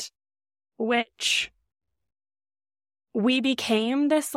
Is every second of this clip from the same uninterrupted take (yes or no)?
yes